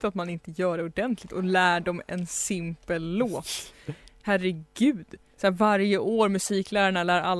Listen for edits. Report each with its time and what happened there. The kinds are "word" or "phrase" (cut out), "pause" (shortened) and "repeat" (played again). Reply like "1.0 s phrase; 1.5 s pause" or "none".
none